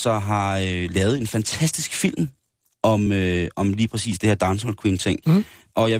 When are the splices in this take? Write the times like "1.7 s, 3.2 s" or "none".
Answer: none